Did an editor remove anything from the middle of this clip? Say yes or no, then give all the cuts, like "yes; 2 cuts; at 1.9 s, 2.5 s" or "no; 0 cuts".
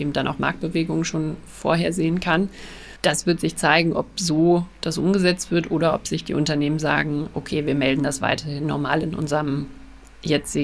yes; 1 cut; at 3.0 s